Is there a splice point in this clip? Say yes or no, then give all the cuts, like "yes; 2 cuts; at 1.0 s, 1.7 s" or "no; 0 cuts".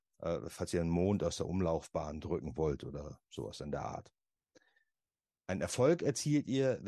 no; 0 cuts